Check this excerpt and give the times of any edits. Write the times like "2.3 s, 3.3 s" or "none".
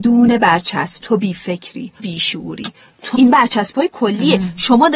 1.0 s, 2.0 s, 3.1 s